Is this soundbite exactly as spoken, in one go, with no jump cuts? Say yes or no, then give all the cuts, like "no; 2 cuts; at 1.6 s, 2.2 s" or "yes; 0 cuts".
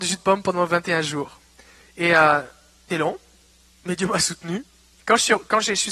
no; 1 cut; at 2.9 s